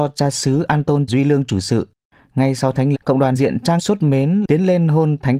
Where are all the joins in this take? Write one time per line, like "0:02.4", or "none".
0:01.1
0:02.9
0:03.4
0:03.8